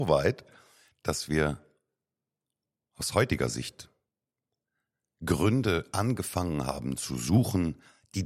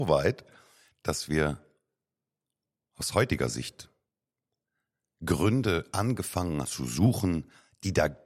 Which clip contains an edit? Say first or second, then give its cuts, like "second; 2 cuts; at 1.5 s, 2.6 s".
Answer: second; 1 cut; at 6.6 s